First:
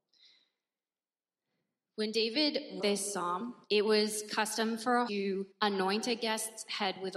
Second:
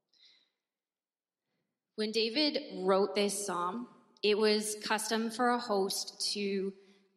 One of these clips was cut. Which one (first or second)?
first